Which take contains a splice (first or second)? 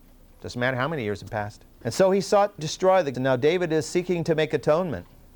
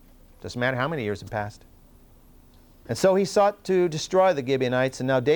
first